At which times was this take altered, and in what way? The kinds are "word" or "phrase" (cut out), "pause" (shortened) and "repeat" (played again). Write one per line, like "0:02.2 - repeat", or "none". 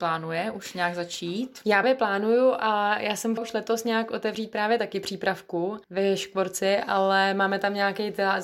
0:01.8 - word
0:03.4 - word
0:05.8 - pause